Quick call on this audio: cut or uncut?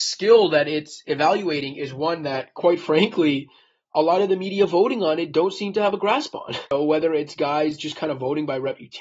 uncut